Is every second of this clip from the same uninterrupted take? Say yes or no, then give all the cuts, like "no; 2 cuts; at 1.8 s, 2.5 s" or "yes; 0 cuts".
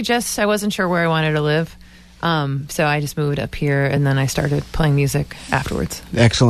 yes; 0 cuts